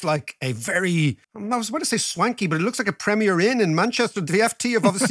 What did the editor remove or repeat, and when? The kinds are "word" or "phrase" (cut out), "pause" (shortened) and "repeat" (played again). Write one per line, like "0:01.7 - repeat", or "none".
0:01.2 - pause